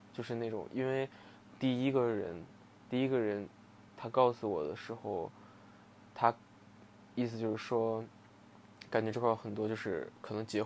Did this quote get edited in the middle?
yes; 1 cut; at 3.9 s

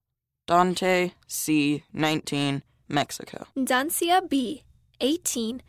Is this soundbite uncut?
no; 2 cuts; at 2.8 s, 3.5 s

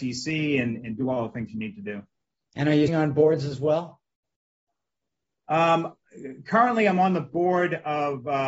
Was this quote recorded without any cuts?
no; 1 cut; at 2.9 s

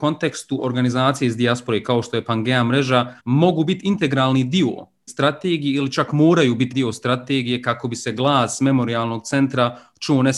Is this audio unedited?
no; 3 cuts; at 3.2 s, 5.1 s, 6.7 s

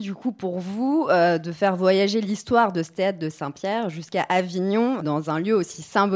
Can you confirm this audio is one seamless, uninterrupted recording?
no; 1 cut; at 5.0 s

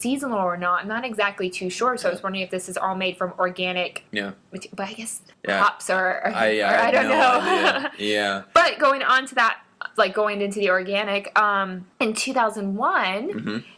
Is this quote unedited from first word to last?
no; 3 cuts; at 4.1 s, 5.3 s, 11.9 s

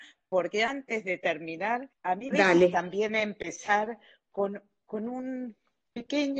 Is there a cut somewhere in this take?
yes; 2 cuts; at 1.9 s, 2.3 s

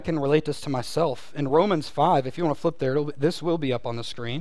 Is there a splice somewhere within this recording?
no; 0 cuts

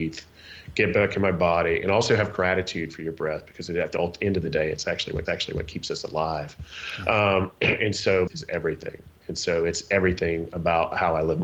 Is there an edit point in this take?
yes; 2 cuts; at 5.3 s, 8.3 s

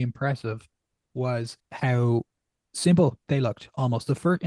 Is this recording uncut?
no; 2 cuts; at 1.6 s, 3.2 s

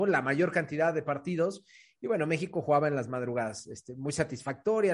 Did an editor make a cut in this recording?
no; 0 cuts

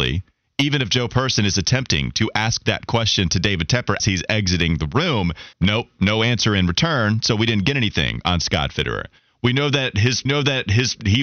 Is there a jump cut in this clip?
yes; 3 cuts; at 4.0 s, 5.5 s, 10.3 s

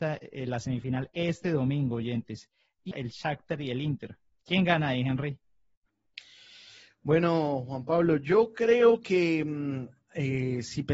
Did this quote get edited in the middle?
yes; 1 cut; at 2.9 s

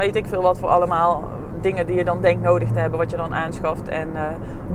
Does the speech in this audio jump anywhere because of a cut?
no; 0 cuts

